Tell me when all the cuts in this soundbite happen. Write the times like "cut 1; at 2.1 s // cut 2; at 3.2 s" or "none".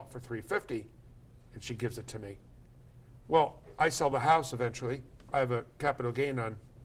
none